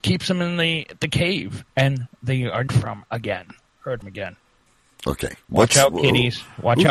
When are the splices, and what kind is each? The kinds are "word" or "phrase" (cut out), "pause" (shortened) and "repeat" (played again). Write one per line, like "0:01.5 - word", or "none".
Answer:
0:01.7 - pause
0:02.7 - phrase
0:04.0 - word
0:04.7 - pause